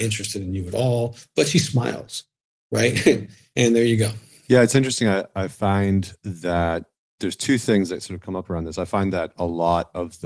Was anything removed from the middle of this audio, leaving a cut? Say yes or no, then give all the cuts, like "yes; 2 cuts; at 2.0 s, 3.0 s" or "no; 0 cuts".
no; 0 cuts